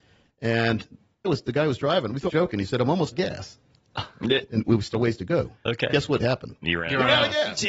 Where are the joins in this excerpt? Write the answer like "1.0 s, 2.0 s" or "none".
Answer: 1.2 s, 2.3 s, 3.1 s, 4.9 s